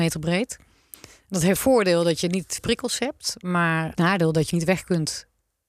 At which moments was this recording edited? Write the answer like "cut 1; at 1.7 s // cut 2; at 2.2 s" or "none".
cut 1; at 1.6 s // cut 2; at 2.6 s // cut 3; at 3.9 s // cut 4; at 4.5 s